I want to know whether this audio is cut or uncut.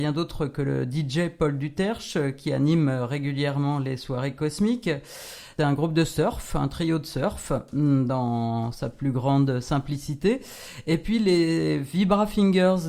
uncut